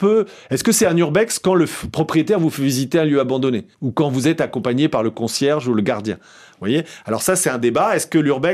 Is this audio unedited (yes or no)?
no